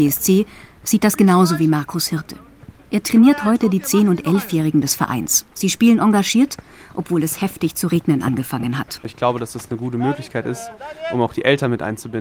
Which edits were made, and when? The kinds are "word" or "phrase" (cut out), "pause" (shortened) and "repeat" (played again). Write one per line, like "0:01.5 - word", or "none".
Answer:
0:02.8 - pause
0:05.5 - pause